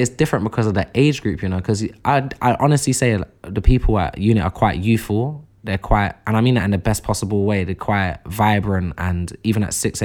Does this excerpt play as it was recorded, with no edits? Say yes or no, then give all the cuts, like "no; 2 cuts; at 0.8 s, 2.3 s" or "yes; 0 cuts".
yes; 0 cuts